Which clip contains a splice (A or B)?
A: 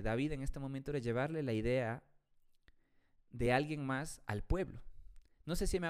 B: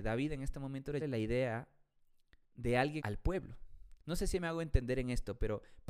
B